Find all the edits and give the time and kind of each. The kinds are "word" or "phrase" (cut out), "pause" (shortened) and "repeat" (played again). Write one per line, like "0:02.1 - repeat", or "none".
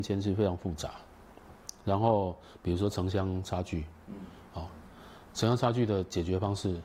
none